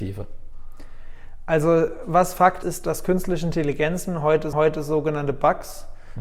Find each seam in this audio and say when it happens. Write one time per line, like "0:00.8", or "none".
0:02.6
0:04.5

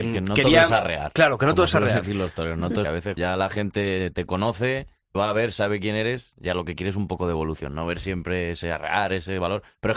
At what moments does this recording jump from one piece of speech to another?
0:02.8
0:03.2
0:05.1

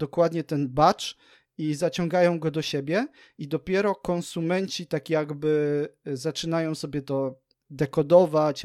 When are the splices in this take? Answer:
none

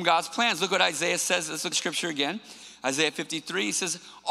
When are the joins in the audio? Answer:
0:01.7

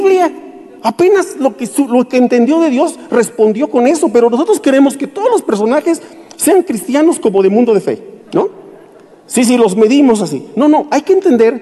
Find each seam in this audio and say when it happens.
0:08.2

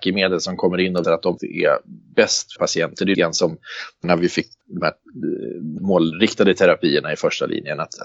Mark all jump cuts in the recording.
0:01.0
0:01.4
0:02.6
0:03.1
0:04.0
0:04.6
0:05.8

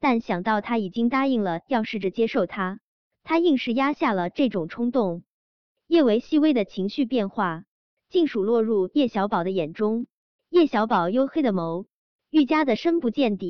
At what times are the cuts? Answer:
none

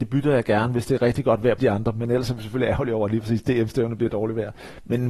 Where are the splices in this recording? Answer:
0:01.6

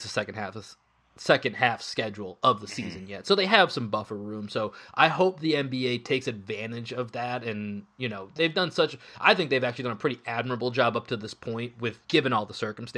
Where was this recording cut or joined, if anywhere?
0:12.0

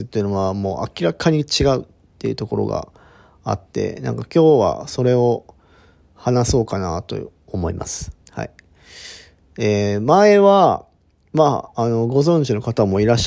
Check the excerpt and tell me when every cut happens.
0:08.2

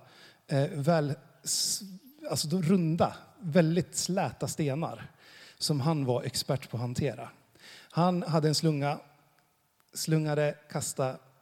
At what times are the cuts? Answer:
none

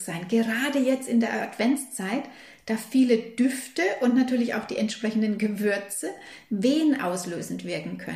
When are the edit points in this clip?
none

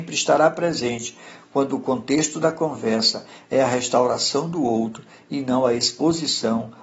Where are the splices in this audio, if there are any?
none

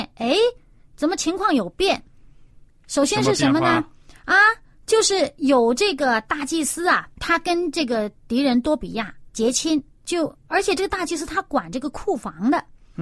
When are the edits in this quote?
0:02.7
0:07.2
0:10.1

